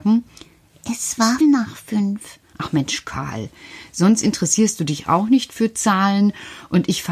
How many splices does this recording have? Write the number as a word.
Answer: one